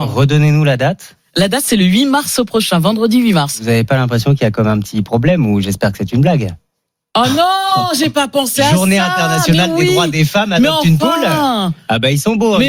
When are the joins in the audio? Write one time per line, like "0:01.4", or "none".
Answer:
none

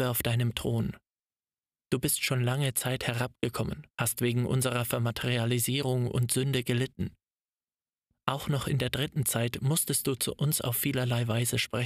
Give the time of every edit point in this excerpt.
0:03.9

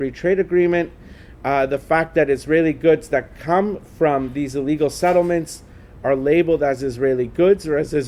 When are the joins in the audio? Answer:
none

